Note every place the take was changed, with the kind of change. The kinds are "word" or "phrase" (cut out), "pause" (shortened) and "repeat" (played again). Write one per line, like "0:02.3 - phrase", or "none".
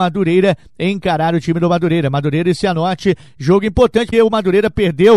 0:04.1 - word